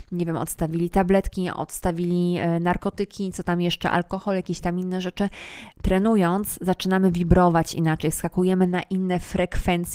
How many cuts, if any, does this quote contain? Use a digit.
1